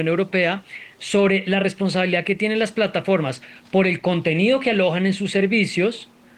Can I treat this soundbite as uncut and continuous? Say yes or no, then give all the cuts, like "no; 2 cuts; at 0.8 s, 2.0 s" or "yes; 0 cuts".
yes; 0 cuts